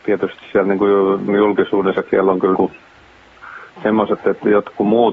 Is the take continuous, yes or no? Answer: no